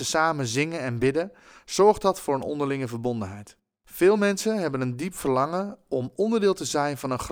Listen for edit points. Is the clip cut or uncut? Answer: uncut